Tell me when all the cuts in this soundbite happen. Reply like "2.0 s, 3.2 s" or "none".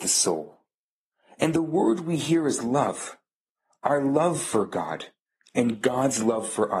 none